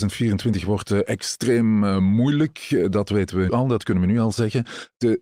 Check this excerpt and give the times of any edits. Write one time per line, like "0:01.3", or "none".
0:03.5

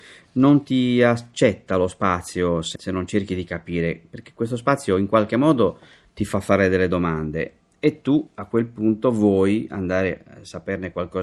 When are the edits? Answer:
0:02.8

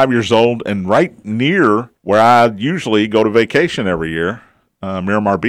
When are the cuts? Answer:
0:02.0

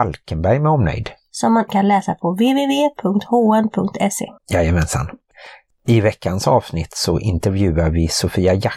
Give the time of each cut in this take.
0:01.7
0:04.4

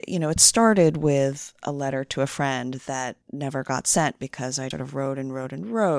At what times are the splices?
0:03.2
0:04.7

